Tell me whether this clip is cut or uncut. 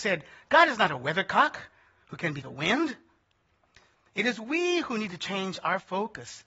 cut